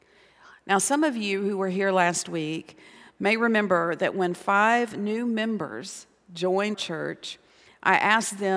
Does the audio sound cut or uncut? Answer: cut